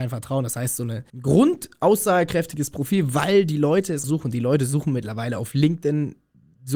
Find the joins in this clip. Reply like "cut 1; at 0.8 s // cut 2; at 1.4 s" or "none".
cut 1; at 1.1 s // cut 2; at 4.0 s